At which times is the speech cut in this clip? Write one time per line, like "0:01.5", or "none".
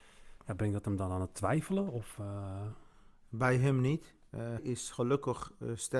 0:04.6